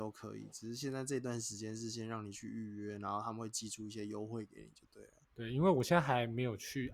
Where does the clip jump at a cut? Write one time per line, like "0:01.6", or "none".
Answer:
none